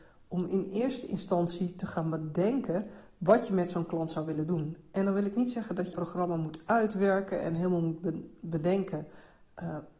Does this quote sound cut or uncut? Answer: cut